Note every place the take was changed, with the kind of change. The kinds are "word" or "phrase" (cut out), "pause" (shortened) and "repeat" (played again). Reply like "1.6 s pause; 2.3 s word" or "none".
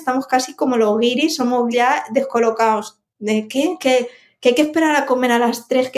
1.7 s word